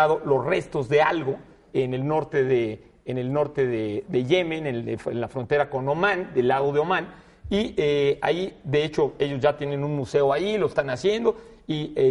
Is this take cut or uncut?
uncut